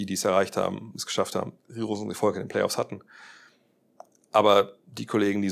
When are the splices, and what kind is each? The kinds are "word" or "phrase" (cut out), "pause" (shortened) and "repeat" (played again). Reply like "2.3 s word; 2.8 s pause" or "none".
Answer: none